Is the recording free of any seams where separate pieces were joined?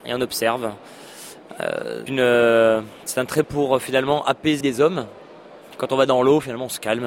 no; 3 cuts; at 2.1 s, 3.4 s, 4.6 s

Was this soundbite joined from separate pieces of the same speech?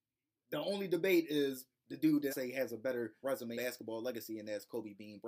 yes; 3 cuts; at 2.3 s, 3.2 s, 3.5 s

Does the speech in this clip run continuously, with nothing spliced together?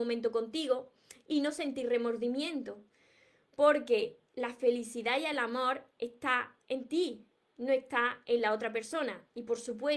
yes; 0 cuts

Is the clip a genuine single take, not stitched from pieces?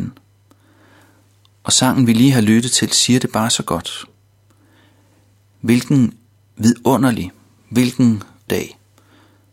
no; 1 cut; at 8.5 s

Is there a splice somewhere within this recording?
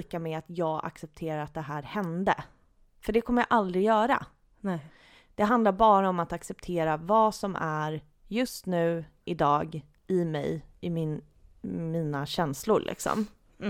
no; 0 cuts

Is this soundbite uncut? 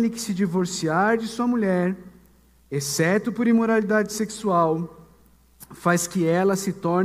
yes; 0 cuts

